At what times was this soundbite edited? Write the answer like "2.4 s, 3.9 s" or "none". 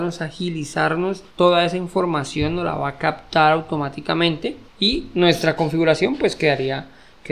1.3 s, 4.7 s